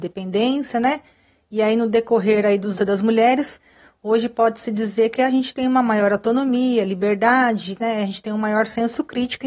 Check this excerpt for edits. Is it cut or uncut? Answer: cut